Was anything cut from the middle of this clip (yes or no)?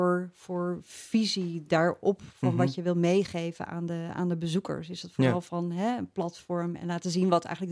no